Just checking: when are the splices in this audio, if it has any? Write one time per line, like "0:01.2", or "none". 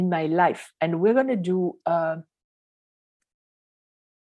none